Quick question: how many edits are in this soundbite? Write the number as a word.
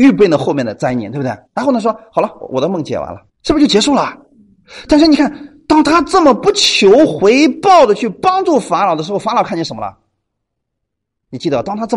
two